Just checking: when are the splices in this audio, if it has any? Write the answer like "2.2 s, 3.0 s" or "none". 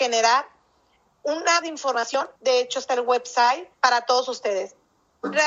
1.6 s, 2.4 s, 2.9 s, 3.7 s